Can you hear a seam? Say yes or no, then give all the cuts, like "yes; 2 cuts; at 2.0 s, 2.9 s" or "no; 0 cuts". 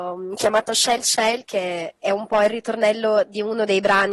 yes; 1 cut; at 1.0 s